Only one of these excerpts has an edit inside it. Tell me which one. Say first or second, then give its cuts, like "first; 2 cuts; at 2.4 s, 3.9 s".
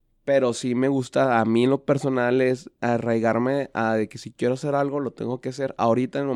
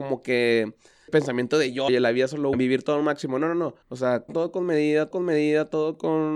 second; 6 cuts; at 1.1 s, 1.9 s, 2.5 s, 3.8 s, 4.3 s, 5.1 s